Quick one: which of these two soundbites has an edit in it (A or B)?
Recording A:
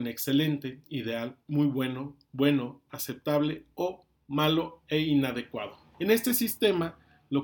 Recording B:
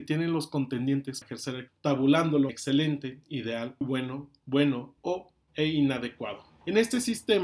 B